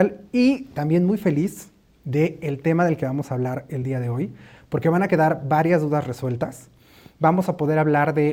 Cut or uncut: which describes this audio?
uncut